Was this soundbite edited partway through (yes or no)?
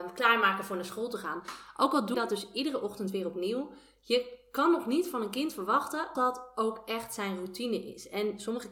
yes